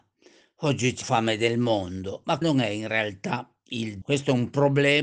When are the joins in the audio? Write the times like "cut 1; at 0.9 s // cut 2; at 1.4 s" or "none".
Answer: cut 1; at 1.0 s // cut 2; at 2.4 s // cut 3; at 4.0 s